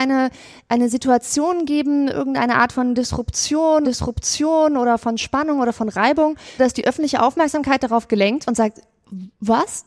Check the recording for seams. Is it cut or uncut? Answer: cut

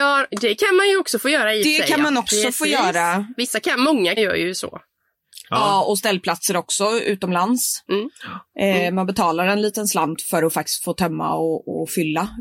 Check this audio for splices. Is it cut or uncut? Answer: cut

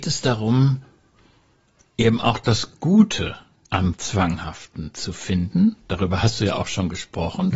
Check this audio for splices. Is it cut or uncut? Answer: uncut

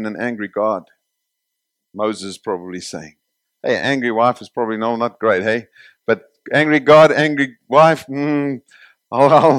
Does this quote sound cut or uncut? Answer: uncut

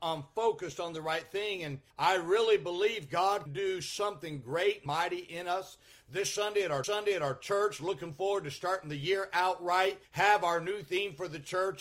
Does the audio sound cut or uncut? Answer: cut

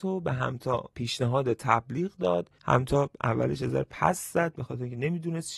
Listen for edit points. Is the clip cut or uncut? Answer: cut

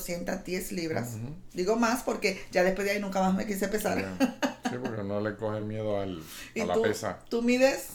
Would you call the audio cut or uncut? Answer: uncut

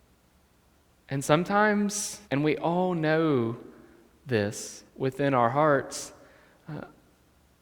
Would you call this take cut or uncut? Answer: cut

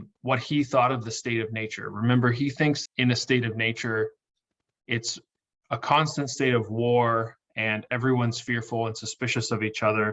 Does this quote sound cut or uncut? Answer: cut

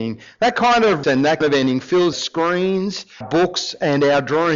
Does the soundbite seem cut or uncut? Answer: cut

